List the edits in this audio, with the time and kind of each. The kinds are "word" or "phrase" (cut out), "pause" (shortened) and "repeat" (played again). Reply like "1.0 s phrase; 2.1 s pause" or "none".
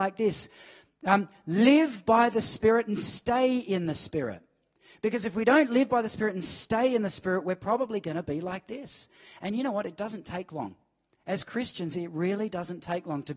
none